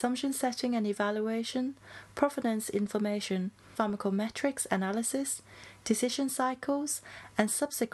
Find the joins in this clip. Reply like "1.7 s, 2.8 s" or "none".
3.8 s

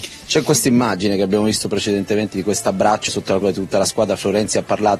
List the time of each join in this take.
3.1 s, 3.4 s

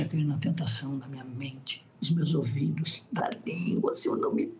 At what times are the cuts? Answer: 1.9 s, 3.2 s

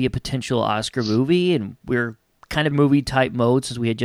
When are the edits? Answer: 2.7 s

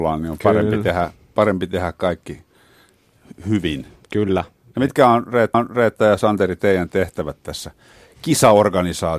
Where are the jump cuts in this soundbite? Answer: 5.5 s

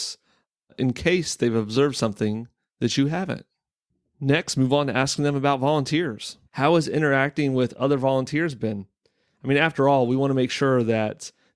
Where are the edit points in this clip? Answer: 6.4 s

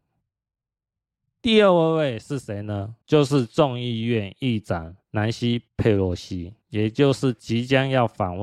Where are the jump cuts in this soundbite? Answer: 3.0 s, 5.0 s, 6.6 s

